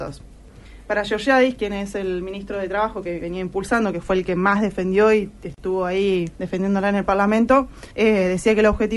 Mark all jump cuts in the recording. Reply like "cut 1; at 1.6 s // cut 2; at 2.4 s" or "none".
cut 1; at 6.3 s // cut 2; at 7.9 s